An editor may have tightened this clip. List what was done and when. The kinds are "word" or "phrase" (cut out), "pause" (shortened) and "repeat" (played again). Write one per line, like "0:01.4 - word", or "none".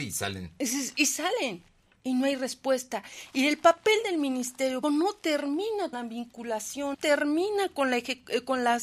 0:04.8 - word
0:05.9 - word
0:06.9 - word